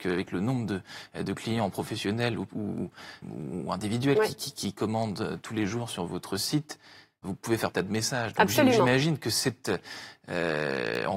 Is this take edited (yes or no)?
yes